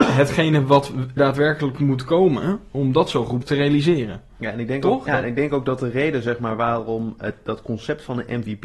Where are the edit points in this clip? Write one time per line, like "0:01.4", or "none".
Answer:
0:01.2
0:03.4
0:05.1

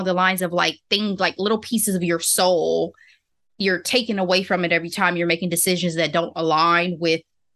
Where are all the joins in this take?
none

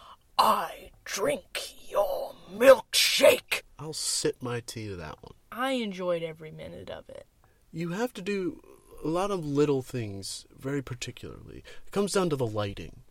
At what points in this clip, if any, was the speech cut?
none

